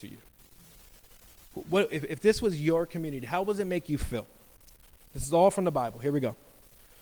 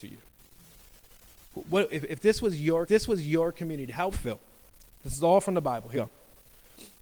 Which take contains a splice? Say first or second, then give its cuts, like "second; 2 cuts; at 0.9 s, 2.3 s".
second; 4 cuts; at 2.9 s, 4.1 s, 4.9 s, 5.9 s